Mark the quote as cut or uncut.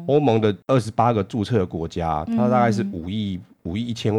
uncut